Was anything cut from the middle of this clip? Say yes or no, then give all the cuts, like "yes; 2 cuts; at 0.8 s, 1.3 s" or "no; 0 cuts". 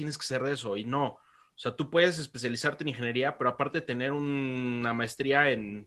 no; 0 cuts